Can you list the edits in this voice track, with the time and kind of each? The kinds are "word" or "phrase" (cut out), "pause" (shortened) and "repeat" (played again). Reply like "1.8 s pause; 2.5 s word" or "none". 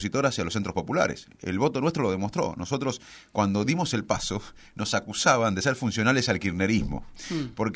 none